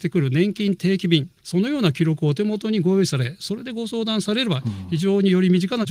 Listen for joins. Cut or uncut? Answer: cut